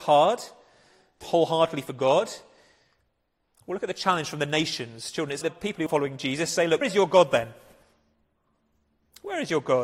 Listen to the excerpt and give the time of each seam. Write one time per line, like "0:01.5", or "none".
0:01.2
0:05.4
0:05.9
0:06.8